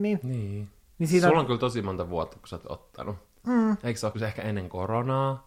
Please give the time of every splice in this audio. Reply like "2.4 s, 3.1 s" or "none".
2.6 s, 4.1 s